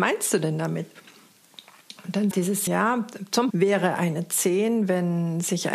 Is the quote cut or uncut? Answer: cut